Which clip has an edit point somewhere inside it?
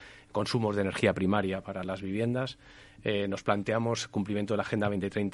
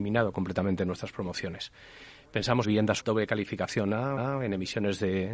second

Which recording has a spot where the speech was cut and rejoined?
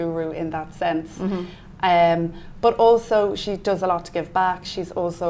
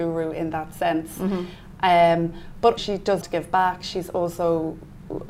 second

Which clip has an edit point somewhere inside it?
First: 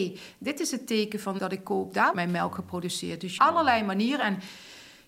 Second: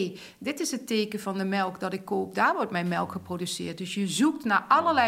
first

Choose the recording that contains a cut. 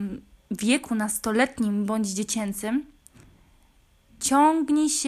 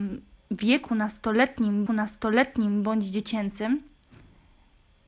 second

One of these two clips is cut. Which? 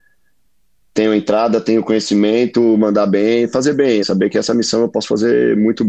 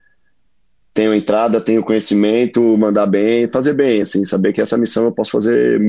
first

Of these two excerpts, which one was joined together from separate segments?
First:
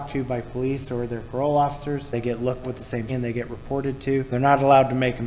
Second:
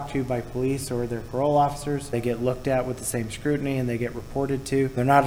first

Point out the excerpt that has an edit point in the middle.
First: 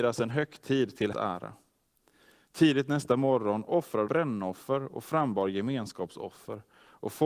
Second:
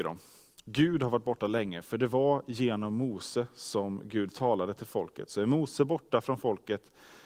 first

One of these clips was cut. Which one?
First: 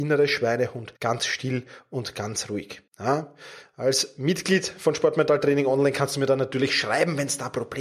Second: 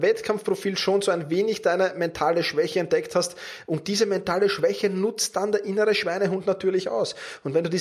first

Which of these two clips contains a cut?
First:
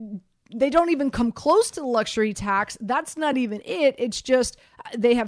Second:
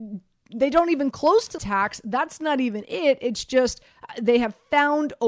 second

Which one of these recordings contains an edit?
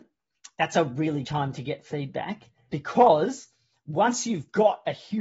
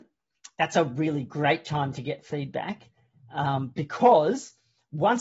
first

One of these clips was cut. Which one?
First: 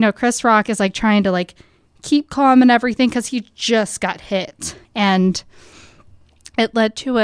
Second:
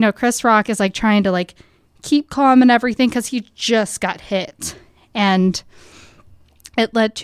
first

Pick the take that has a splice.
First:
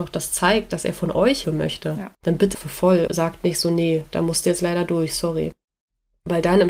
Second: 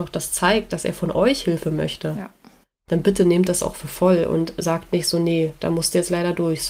first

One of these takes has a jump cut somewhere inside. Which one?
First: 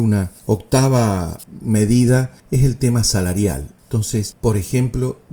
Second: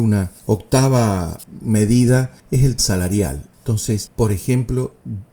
second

